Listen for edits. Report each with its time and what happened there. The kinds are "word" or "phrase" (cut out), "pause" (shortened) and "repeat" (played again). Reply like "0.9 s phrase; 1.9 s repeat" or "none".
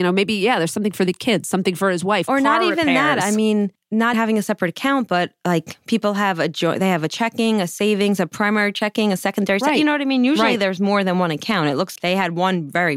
4.1 s word; 12.0 s word